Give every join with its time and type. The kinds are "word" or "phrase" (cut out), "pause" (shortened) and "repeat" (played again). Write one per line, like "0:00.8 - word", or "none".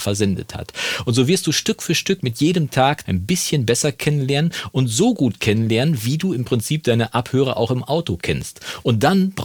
0:03.0 - phrase